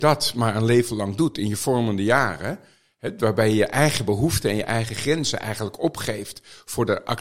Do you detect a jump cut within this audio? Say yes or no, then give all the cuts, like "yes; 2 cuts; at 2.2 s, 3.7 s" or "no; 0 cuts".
no; 0 cuts